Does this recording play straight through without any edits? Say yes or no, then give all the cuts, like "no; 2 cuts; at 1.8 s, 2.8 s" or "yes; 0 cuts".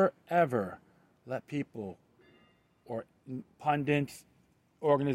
yes; 0 cuts